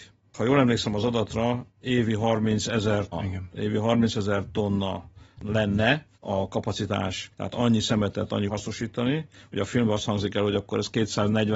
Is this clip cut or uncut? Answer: cut